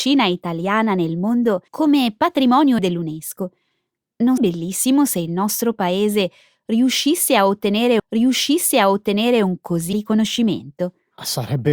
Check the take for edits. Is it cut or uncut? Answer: cut